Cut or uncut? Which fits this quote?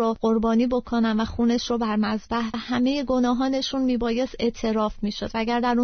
cut